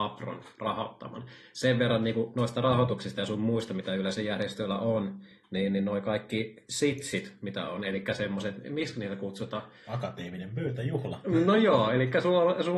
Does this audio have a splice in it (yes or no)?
no